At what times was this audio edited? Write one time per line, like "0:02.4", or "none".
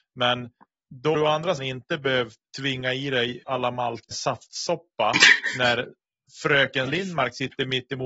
0:01.1
0:01.6
0:02.4
0:03.4
0:04.1
0:06.9